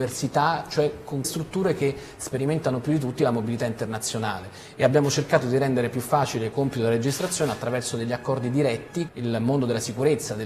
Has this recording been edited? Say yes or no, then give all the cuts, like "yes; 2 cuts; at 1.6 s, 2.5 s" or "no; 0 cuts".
yes; 3 cuts; at 1.2 s, 6.5 s, 9.1 s